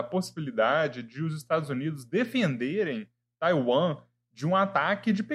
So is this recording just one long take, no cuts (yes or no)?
yes